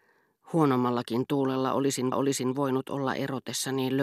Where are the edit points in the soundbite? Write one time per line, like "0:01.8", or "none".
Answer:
0:02.1